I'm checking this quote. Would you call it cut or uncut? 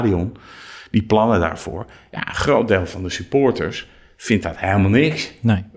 uncut